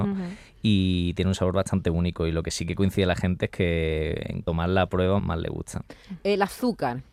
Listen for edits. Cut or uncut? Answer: cut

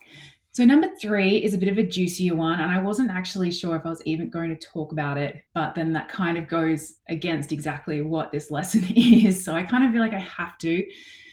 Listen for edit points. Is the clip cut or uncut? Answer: cut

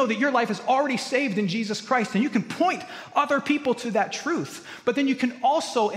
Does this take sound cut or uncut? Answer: uncut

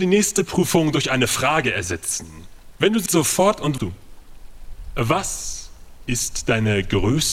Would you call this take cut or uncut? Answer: cut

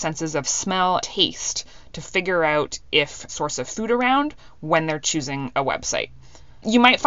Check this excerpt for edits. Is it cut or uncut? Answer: cut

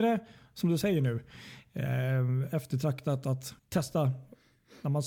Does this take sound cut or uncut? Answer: cut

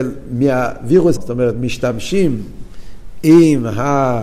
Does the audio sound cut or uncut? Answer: cut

